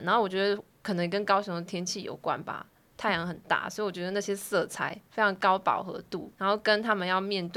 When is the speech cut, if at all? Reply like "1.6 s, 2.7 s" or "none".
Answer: 6.3 s